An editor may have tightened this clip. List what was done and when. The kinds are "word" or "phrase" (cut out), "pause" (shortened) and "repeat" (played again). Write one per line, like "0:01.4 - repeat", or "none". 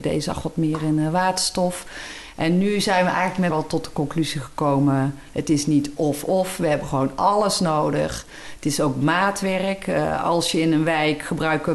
0:03.5 - phrase
0:06.0 - word

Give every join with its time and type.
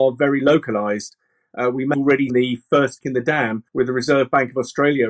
0:01.9 - word
0:02.3 - word
0:03.0 - word
0:03.7 - pause

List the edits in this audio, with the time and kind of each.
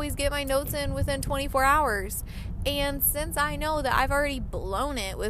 none

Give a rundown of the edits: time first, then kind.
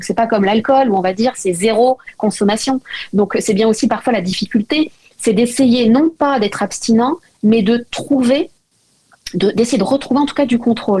none

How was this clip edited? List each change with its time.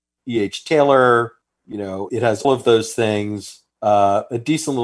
0:01.4 - pause
0:02.1 - word
0:02.4 - word
0:03.7 - pause

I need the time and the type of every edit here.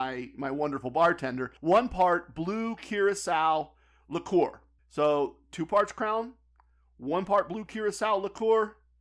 0:01.6 - pause
0:04.8 - pause

